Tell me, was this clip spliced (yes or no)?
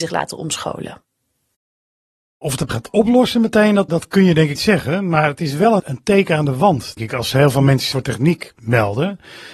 yes